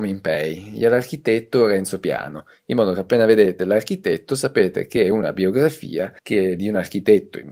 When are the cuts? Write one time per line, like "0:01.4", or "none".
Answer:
0:06.2

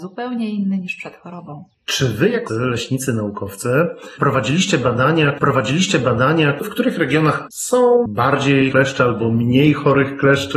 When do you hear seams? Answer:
0:01.7
0:02.5
0:05.4
0:07.5
0:08.7

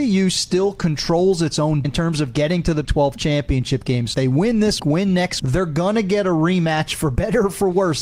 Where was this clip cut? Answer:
0:01.8
0:02.8
0:04.1
0:04.8
0:05.4

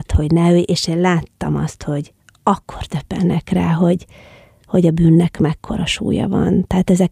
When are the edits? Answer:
none

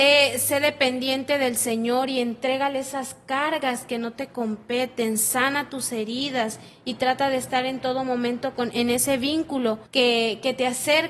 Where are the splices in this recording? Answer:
0:09.9

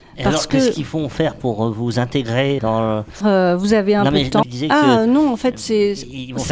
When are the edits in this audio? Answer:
0:02.6
0:03.2
0:04.4

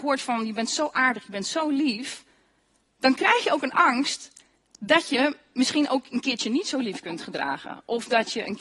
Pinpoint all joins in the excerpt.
none

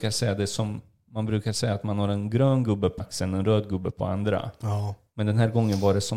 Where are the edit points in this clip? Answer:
0:03.0

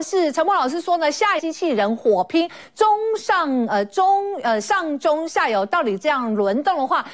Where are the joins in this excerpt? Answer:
0:01.4

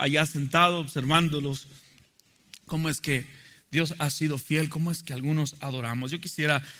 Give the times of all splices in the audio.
none

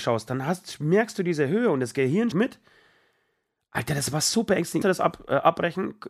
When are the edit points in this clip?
0:02.3
0:04.8

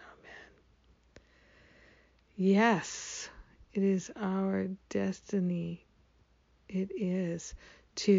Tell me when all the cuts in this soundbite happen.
none

